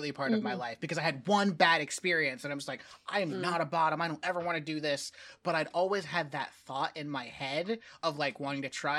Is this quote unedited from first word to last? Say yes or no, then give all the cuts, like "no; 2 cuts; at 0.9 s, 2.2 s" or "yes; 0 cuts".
yes; 0 cuts